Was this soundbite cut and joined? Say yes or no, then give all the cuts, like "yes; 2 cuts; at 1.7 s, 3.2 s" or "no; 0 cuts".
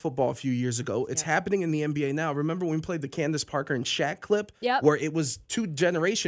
no; 0 cuts